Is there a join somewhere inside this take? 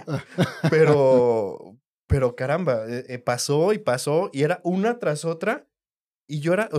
no; 0 cuts

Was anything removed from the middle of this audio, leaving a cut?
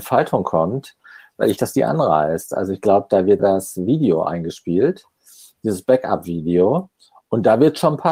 yes; 2 cuts; at 1.6 s, 3.4 s

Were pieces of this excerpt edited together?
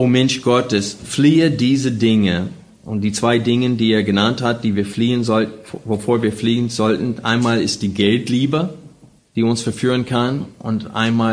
yes; 1 cut; at 9.2 s

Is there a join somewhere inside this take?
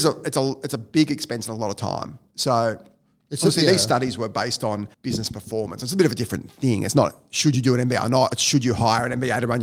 yes; 1 cut; at 4.9 s

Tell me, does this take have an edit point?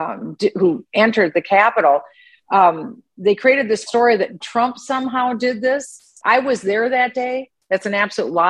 yes; 2 cuts; at 3.9 s, 4.4 s

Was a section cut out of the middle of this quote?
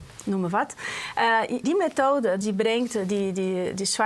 yes; 2 cuts; at 1.6 s, 2.4 s

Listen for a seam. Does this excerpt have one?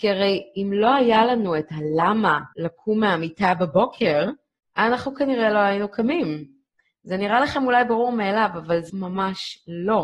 yes; 4 cuts; at 2.5 s, 4.6 s, 6.8 s, 8.9 s

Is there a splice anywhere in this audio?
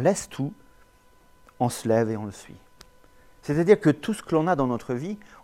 no; 0 cuts

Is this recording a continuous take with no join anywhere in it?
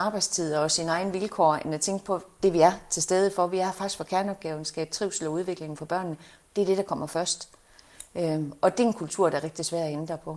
yes; 0 cuts

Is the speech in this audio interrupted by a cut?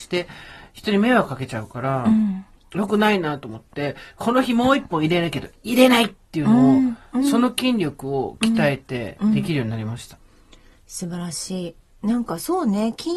no; 0 cuts

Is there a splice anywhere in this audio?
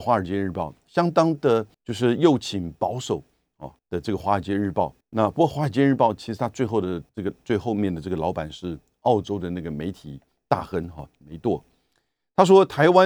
yes; 4 cuts; at 1.7 s, 3.8 s, 5.0 s, 7.1 s

